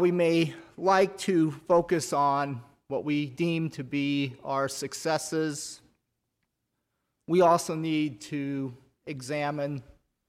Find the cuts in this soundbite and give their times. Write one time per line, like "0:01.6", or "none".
none